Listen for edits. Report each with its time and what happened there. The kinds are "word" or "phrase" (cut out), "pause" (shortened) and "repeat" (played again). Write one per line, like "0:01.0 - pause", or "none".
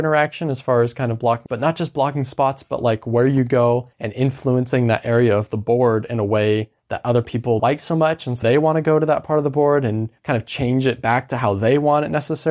0:01.5 - word
0:03.9 - pause
0:06.8 - pause
0:07.6 - phrase
0:08.4 - word
0:10.2 - pause